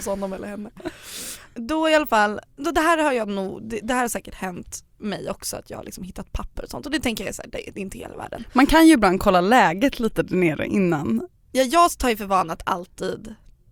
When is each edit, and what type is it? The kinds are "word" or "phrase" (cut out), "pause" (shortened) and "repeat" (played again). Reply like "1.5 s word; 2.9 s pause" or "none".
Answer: none